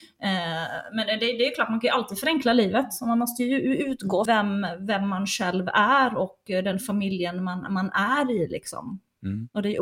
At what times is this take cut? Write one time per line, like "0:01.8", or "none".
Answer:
0:04.3

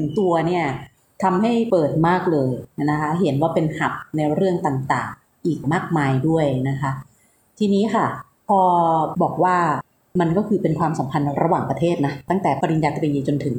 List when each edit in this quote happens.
none

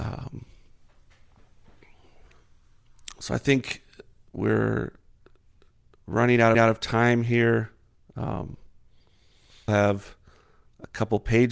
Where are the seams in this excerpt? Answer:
0:06.5
0:09.7

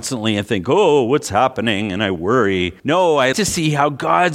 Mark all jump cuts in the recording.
0:02.8
0:03.3

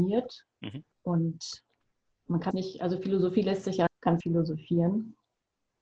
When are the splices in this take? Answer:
0:00.9
0:02.5
0:03.9
0:04.2

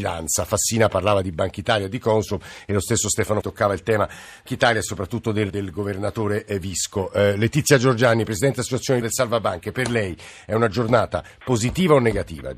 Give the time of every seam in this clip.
0:03.4
0:04.5
0:05.5
0:09.0

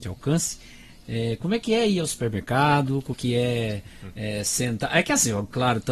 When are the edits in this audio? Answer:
0:03.1

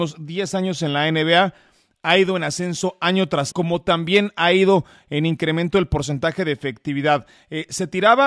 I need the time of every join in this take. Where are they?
0:03.5

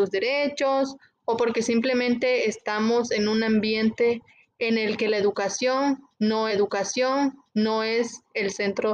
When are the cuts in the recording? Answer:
0:06.5

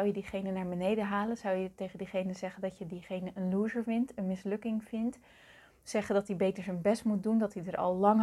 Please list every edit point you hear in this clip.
none

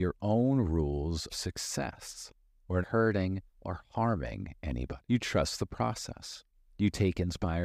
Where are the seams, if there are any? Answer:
0:01.3
0:02.8
0:03.5
0:05.0

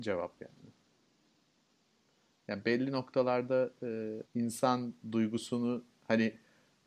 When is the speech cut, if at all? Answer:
0:04.3

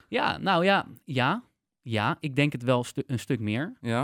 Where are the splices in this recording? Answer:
none

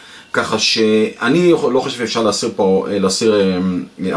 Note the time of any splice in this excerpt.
none

